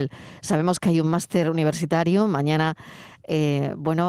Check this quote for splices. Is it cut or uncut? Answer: uncut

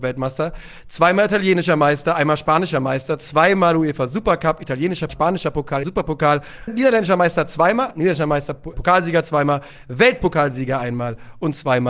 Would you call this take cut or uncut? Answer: cut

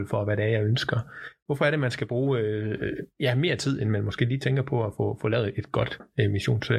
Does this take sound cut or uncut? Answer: uncut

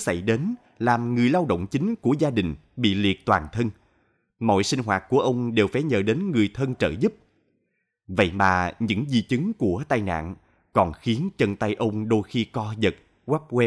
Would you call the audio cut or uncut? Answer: uncut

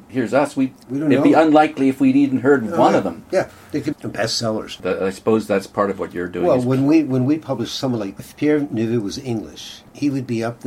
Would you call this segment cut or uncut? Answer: cut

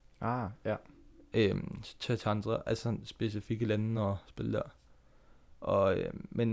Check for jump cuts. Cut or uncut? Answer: uncut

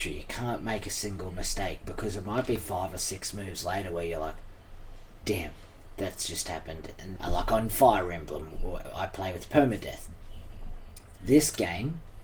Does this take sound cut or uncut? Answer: cut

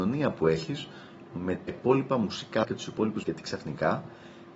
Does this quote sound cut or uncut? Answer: cut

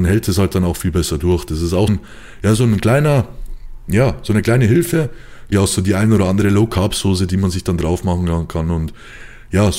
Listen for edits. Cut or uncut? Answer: cut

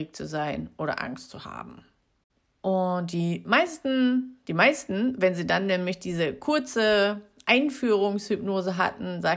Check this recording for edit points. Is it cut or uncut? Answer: cut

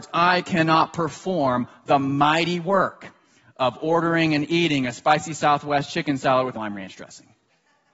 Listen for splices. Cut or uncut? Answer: cut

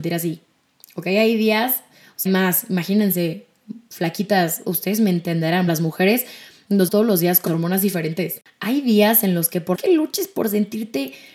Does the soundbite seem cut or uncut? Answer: cut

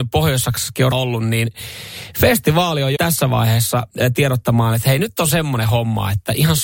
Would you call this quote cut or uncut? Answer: cut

